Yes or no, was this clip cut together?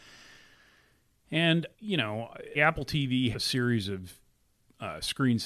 yes